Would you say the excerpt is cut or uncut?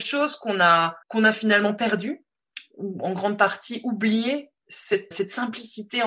cut